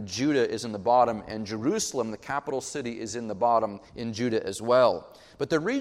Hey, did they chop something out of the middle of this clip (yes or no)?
yes